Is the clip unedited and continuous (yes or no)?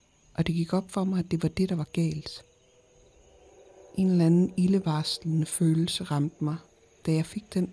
yes